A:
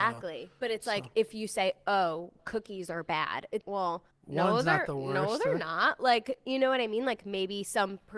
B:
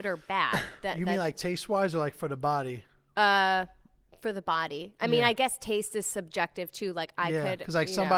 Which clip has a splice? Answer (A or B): A